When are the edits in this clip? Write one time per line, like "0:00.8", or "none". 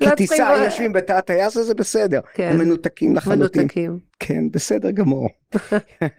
none